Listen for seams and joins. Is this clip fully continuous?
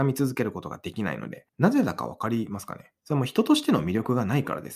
no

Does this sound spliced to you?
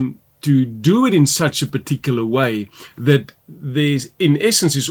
no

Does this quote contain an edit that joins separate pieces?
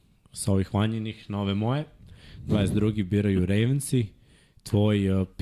no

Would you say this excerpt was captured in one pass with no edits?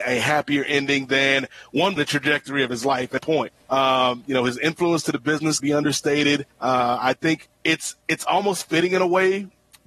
no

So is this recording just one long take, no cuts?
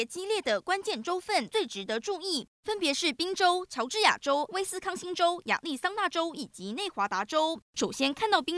no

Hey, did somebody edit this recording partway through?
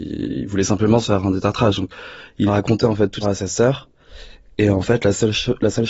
yes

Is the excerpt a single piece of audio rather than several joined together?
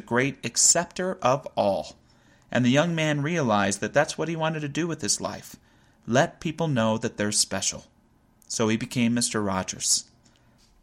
yes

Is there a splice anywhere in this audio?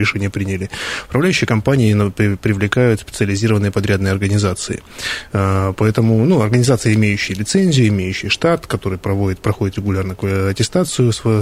no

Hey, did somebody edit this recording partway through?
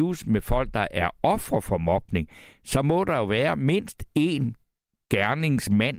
no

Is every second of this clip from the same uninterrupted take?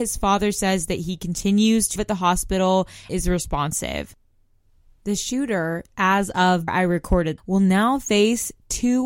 no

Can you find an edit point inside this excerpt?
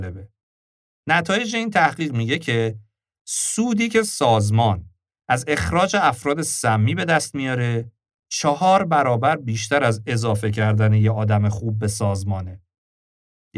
no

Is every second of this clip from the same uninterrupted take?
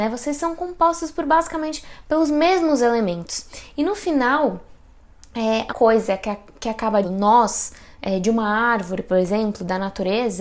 no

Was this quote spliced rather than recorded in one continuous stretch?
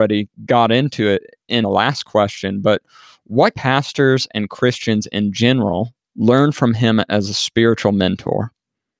yes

